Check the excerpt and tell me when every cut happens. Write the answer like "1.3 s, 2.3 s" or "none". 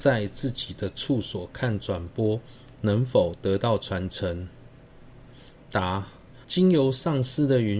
6.4 s